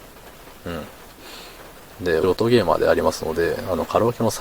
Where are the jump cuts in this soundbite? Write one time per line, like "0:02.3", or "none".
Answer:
0:02.2